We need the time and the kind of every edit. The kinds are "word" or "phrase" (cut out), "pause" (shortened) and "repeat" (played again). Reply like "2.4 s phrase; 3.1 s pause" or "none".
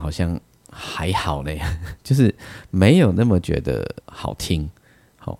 2.0 s pause; 4.0 s pause